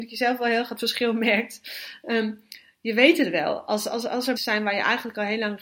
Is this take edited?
yes; 1 cut; at 4.4 s

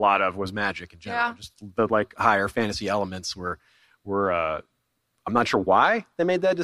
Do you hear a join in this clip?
no; 0 cuts

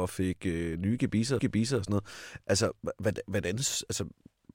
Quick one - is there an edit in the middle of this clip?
yes; 1 cut; at 1.4 s

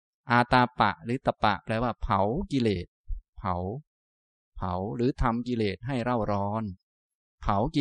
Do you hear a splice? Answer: no; 0 cuts

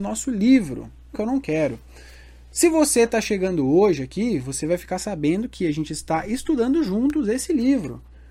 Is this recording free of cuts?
no; 1 cut; at 1.1 s

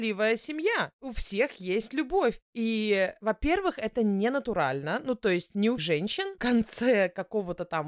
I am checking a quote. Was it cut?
yes; 2 cuts; at 5.8 s, 6.4 s

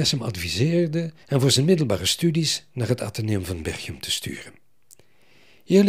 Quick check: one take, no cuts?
no; 1 cut; at 1.2 s

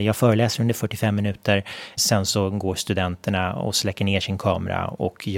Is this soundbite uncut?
no; 1 cut; at 2.0 s

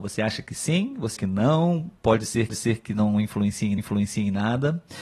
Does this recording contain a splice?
yes; 4 cuts; at 1.2 s, 2.0 s, 2.5 s, 3.8 s

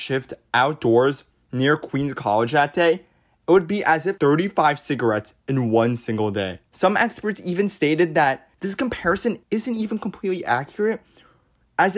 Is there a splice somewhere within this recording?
yes; 4 cuts; at 4.2 s, 6.7 s, 8.5 s, 9.4 s

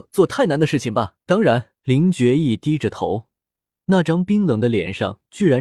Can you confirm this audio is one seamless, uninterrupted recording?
no; 2 cuts; at 1.2 s, 1.8 s

